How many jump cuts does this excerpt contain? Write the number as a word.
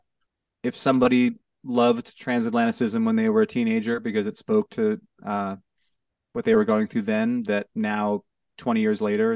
zero